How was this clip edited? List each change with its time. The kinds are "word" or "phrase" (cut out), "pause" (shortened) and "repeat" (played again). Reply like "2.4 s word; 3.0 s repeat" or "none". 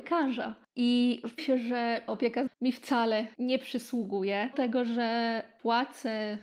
1.4 s phrase; 2.1 s word; 2.5 s word; 3.3 s pause; 4.5 s word